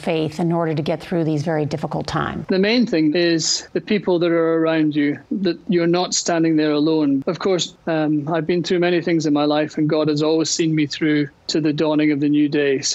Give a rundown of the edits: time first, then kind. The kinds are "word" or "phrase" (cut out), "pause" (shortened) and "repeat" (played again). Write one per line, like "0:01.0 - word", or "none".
none